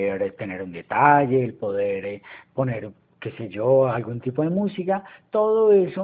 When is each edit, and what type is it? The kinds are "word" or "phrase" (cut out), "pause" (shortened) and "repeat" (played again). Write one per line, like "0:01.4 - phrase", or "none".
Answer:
none